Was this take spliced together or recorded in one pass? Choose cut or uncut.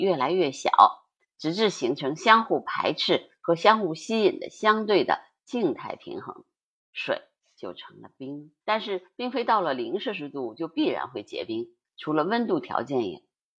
cut